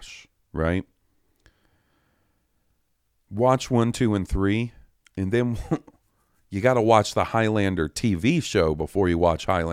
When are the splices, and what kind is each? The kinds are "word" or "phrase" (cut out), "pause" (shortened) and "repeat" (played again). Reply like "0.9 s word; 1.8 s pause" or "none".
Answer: none